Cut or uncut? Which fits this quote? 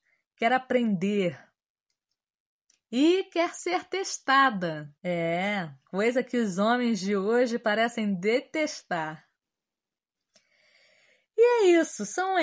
cut